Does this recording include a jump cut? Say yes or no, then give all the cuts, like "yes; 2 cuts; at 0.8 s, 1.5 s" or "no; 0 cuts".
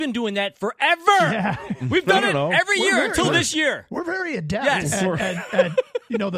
no; 0 cuts